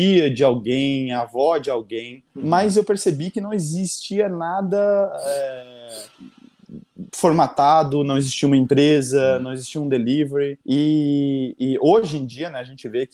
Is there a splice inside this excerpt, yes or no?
yes